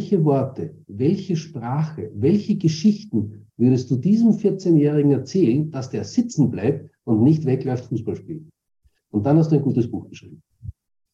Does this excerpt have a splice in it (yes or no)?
no